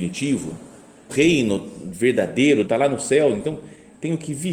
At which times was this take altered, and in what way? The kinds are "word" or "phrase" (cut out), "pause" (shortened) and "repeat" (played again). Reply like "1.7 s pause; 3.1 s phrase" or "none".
1.1 s word; 2.6 s word